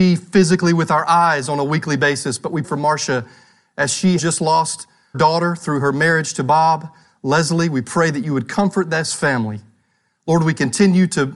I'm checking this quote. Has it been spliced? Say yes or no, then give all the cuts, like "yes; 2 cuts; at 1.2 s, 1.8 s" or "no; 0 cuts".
yes; 3 cuts; at 2.6 s, 4.2 s, 5.1 s